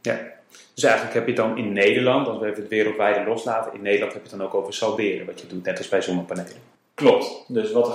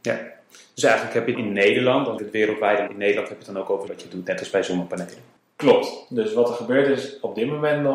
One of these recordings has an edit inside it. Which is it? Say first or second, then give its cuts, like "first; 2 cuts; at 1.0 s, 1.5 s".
second; 4 cuts; at 1.3 s, 2.2 s, 2.9 s, 3.9 s